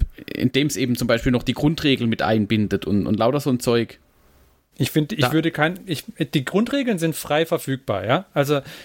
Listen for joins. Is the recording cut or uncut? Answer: uncut